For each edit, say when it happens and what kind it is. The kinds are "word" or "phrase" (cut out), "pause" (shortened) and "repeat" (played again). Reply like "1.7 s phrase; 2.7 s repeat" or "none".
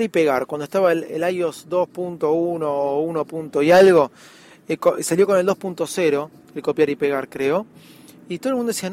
none

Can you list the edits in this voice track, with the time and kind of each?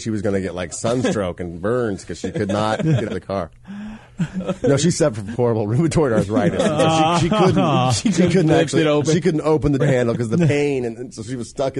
3.1 s word; 5.3 s word; 9.8 s word

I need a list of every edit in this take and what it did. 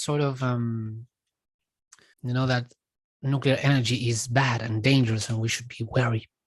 2.1 s phrase

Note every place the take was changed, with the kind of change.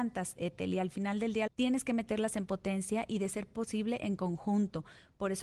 1.5 s phrase

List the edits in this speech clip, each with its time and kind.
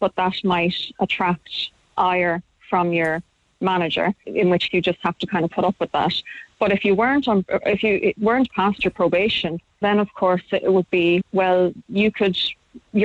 4.2 s word; 4.7 s word; 9.8 s word; 11.2 s word

